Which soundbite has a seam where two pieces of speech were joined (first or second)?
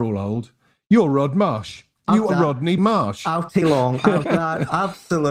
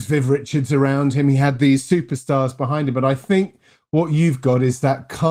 first